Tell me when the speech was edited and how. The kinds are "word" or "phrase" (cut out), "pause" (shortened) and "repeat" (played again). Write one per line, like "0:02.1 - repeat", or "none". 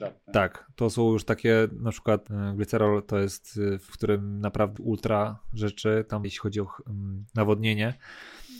0:02.3 - word
0:03.9 - word
0:04.8 - word
0:06.2 - word